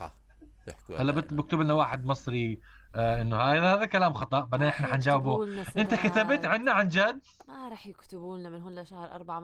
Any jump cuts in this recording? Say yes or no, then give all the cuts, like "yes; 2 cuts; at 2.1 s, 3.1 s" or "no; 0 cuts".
no; 0 cuts